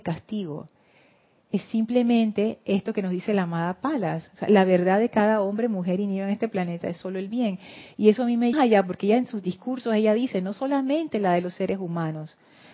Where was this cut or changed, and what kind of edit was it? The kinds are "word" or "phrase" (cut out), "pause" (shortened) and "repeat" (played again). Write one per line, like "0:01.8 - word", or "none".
0:08.5 - phrase

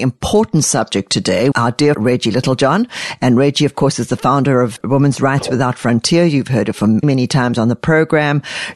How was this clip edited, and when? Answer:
0:01.5 - word
0:01.9 - word
0:07.0 - word

